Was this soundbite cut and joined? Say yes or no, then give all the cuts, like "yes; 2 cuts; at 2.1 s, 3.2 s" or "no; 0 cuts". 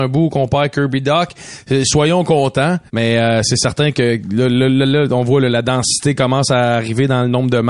yes; 1 cut; at 2.9 s